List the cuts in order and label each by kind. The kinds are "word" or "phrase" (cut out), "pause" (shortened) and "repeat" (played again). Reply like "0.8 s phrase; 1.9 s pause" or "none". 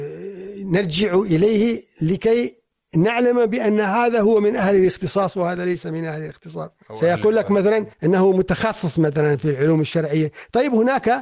6.8 s pause; 7.9 s pause

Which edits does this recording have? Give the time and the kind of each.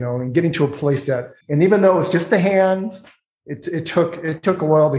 1.4 s pause

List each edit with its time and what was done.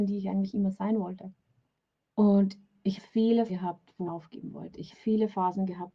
1.8 s pause; 3.0 s word; 3.5 s word; 4.1 s word; 4.9 s word

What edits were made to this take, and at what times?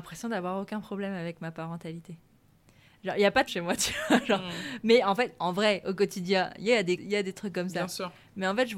3.5 s word; 7.0 s word

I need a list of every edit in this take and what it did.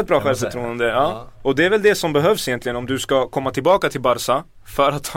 none

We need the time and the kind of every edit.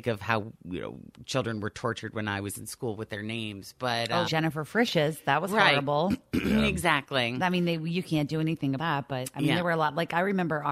4.2 s word; 8.8 s word

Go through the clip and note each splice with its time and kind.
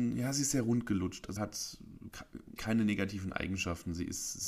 1.4 s word; 2.6 s word

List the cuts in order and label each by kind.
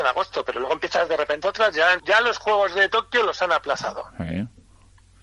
1.4 s word; 2.0 s word

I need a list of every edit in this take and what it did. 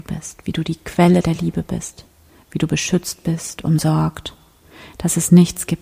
none

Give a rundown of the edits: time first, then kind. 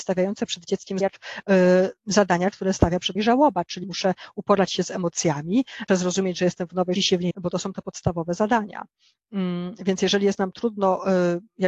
1.0 s word; 3.2 s word; 3.8 s word; 5.9 s word; 7.0 s word; 7.3 s word

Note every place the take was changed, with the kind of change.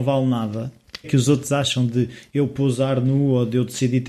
1.0 s phrase

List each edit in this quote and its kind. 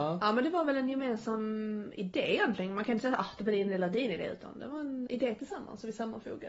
5.1 s word

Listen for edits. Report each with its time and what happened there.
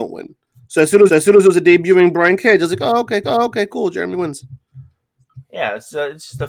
1.1 s repeat; 3.2 s repeat

